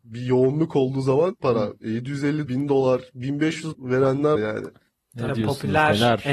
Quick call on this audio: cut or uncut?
cut